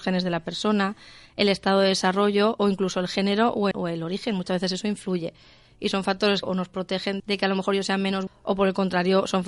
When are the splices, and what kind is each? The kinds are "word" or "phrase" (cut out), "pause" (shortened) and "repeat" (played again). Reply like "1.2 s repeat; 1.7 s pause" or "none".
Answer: 3.7 s word; 6.4 s word; 7.2 s word; 8.3 s word